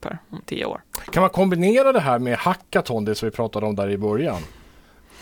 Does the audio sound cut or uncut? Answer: uncut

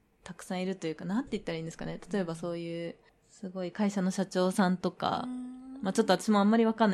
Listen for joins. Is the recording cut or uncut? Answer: cut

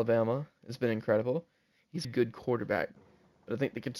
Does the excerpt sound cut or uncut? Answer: cut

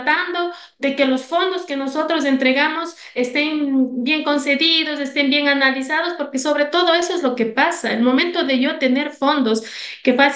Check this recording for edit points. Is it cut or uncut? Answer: cut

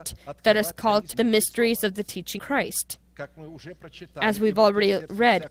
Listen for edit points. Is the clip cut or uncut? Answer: cut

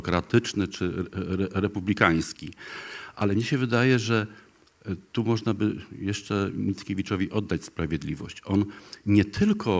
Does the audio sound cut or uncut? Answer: uncut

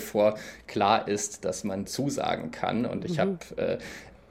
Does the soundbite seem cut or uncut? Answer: cut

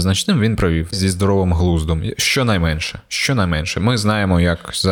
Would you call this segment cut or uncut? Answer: cut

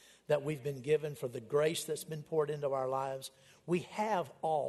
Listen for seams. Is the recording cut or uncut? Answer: uncut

